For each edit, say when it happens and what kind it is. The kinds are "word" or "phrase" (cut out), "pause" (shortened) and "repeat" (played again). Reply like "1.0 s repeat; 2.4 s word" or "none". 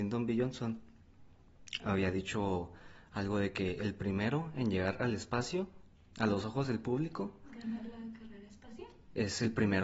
none